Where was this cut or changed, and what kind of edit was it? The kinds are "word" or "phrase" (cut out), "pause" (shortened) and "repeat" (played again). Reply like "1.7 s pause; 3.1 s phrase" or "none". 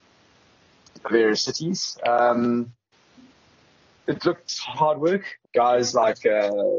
4.7 s word; 5.4 s word